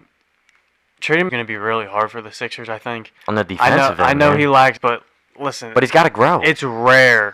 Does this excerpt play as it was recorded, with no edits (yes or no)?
no